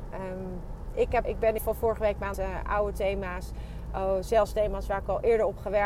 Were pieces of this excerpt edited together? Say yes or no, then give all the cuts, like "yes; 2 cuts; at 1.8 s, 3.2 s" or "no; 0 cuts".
yes; 3 cuts; at 1.2 s, 1.6 s, 2.3 s